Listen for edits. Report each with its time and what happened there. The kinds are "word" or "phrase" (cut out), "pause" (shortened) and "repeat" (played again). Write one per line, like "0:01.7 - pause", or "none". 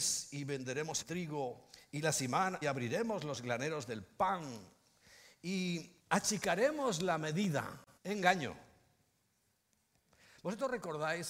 0:01.0 - word
0:02.6 - phrase
0:06.0 - pause
0:08.0 - pause